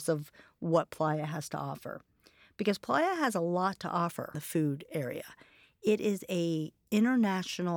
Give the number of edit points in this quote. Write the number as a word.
one